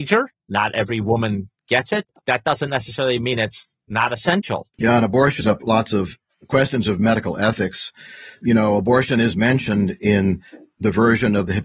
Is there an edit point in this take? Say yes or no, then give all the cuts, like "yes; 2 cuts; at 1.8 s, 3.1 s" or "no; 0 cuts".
yes; 3 cuts; at 2.2 s, 4.7 s, 5.4 s